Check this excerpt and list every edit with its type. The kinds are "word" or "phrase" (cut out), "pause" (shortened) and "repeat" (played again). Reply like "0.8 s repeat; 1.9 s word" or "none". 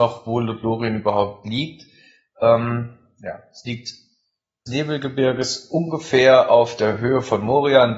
4.7 s phrase